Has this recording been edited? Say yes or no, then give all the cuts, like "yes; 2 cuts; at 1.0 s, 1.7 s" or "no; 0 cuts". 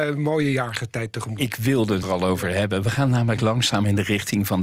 yes; 1 cut; at 2.0 s